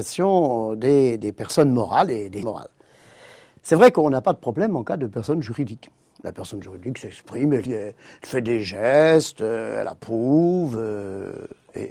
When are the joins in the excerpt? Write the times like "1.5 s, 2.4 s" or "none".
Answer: 2.4 s, 7.7 s